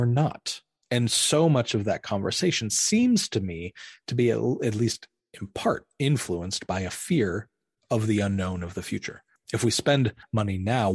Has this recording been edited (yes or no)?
no